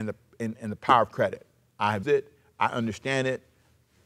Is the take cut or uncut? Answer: cut